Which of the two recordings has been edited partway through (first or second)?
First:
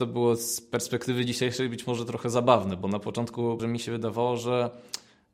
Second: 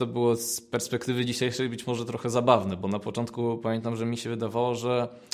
first